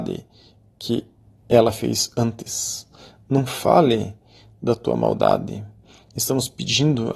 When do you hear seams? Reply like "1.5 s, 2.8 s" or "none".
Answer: none